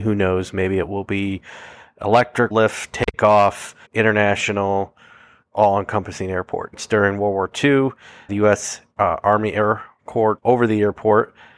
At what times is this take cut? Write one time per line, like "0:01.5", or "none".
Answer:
0:02.5
0:03.9
0:08.3
0:08.9
0:10.4